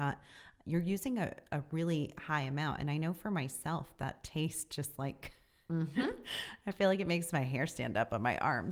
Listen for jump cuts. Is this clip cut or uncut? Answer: uncut